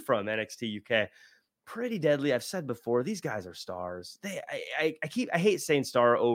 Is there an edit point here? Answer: no; 0 cuts

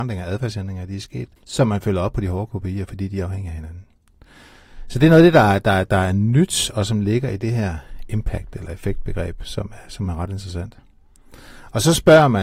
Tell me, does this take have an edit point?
yes; 1 cut; at 1.4 s

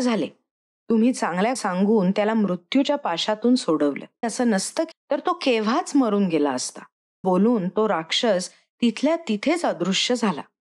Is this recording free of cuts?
no; 4 cuts; at 1.6 s, 4.2 s, 4.9 s, 7.2 s

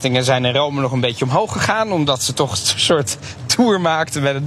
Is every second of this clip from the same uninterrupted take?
yes; 0 cuts

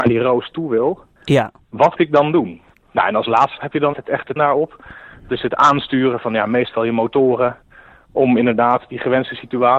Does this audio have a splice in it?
yes; 5 cuts; at 2.0 s, 3.6 s, 3.9 s, 4.4 s, 5.3 s

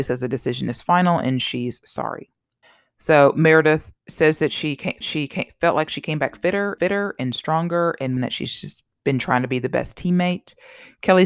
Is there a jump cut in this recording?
yes; 5 cuts; at 2.6 s, 4.0 s, 5.0 s, 6.8 s, 8.2 s

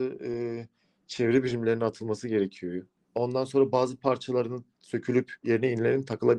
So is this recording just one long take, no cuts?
no; 1 cut; at 3.0 s

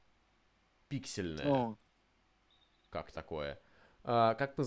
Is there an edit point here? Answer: yes; 1 cut; at 3.1 s

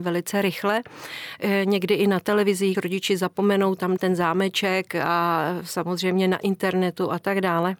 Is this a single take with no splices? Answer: no; 2 cuts; at 2.7 s, 4.0 s

